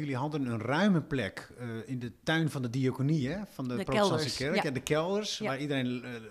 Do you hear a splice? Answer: no; 0 cuts

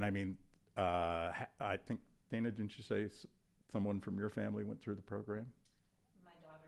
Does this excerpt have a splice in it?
no; 0 cuts

